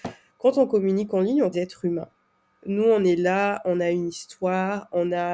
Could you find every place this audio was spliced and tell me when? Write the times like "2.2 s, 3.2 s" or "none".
1.5 s